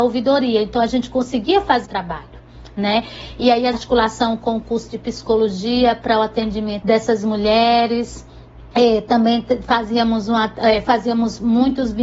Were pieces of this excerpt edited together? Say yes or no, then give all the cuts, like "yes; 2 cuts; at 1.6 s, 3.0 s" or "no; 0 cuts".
yes; 4 cuts; at 1.9 s, 3.7 s, 6.8 s, 8.7 s